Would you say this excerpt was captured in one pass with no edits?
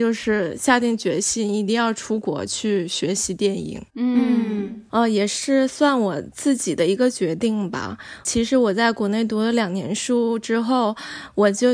no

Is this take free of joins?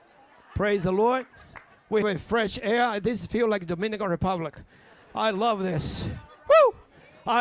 no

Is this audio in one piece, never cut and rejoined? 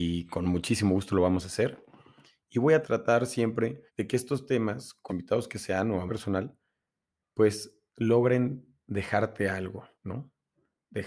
no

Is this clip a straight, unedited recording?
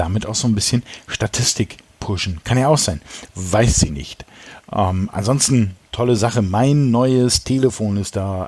no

